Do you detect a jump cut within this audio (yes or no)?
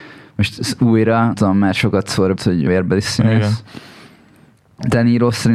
yes